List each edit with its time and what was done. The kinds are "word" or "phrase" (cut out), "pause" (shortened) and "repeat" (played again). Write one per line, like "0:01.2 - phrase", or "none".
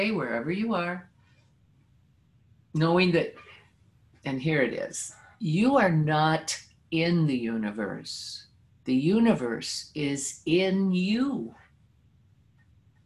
none